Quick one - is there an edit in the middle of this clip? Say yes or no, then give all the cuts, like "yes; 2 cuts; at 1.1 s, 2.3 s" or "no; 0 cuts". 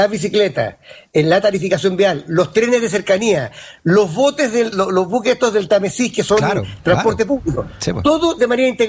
yes; 1 cut; at 4.7 s